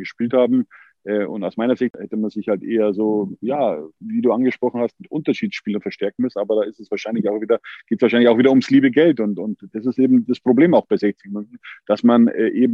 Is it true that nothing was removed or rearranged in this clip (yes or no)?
yes